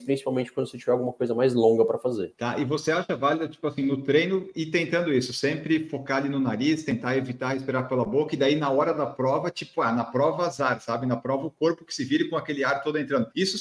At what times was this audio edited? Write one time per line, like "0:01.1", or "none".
none